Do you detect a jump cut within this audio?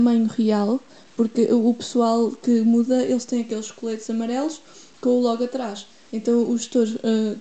no; 0 cuts

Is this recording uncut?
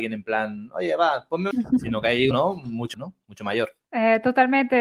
no; 4 cuts; at 1.5 s, 2.3 s, 2.9 s, 3.8 s

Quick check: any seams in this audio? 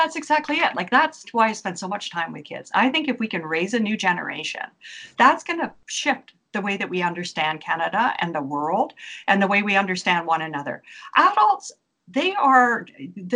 no; 0 cuts

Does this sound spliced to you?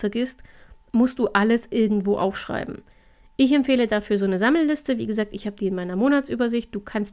no; 0 cuts

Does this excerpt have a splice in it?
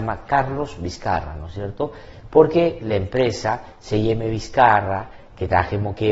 no; 0 cuts

